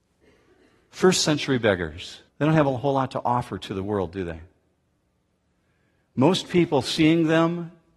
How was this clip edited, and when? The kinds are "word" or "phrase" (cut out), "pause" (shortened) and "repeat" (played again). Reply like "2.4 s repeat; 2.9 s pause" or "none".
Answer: 2.3 s pause

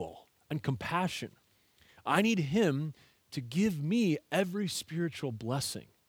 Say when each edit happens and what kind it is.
none

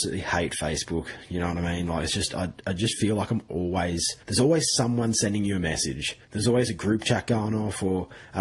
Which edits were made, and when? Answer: 4.2 s pause; 6.2 s pause

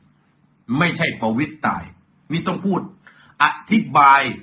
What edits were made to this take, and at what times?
none

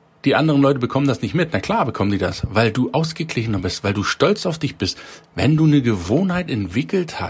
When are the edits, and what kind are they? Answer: 5.3 s pause

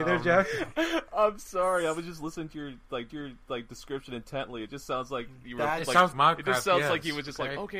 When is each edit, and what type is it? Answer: 3.1 s repeat; 6.1 s word

